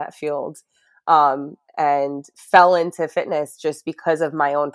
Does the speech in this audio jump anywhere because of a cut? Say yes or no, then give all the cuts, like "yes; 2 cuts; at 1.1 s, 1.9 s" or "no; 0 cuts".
no; 0 cuts